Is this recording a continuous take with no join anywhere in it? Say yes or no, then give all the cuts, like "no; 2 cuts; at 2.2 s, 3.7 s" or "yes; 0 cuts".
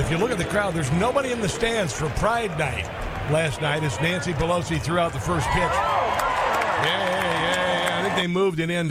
yes; 0 cuts